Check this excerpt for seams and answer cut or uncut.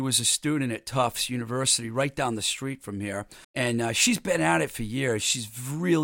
cut